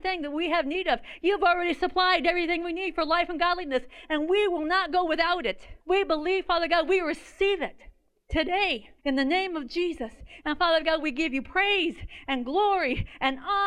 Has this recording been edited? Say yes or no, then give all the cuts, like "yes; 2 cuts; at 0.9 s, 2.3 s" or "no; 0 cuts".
yes; 2 cuts; at 5.8 s, 9.0 s